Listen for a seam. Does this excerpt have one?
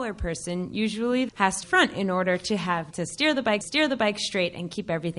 yes; 4 cuts; at 1.3 s, 1.6 s, 2.9 s, 3.6 s

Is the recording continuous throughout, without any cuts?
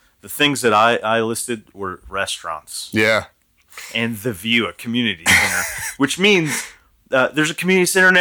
yes; 0 cuts

